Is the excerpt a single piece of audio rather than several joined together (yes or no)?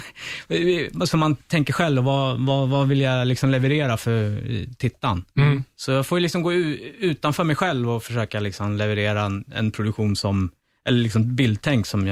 yes